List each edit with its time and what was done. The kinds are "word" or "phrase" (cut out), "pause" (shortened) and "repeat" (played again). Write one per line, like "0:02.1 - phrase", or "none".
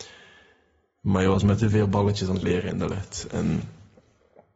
0:02.4 - word